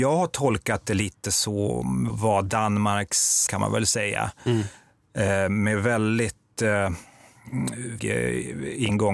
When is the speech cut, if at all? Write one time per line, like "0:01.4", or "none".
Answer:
0:02.1
0:03.5
0:08.0